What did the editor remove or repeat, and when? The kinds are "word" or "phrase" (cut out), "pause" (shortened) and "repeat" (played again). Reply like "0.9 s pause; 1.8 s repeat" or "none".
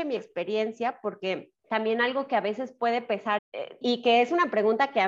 1.6 s pause; 3.4 s word; 3.8 s word